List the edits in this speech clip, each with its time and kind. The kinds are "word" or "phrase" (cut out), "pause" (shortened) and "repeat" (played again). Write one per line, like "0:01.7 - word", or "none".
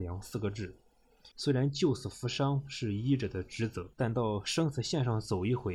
0:01.3 - pause
0:03.9 - pause